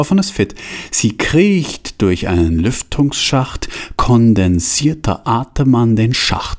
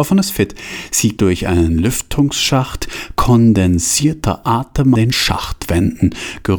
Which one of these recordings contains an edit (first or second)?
second